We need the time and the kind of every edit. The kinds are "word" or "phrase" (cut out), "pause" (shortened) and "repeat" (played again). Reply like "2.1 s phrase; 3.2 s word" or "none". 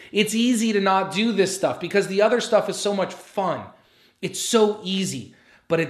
none